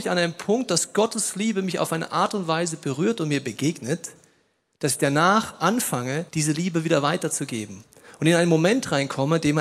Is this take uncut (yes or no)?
no